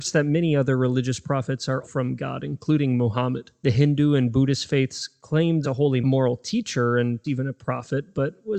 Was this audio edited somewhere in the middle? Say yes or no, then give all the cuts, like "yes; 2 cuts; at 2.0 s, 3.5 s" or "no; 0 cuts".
yes; 4 cuts; at 1.8 s, 5.6 s, 6.0 s, 7.2 s